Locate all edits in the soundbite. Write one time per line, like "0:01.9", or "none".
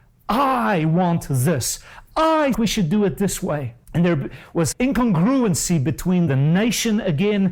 0:02.5
0:03.8
0:04.7
0:06.3